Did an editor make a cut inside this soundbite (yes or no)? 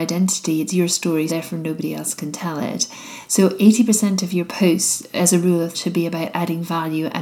yes